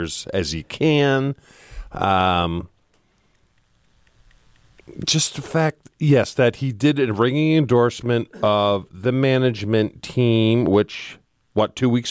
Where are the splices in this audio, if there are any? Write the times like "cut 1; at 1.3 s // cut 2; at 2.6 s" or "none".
none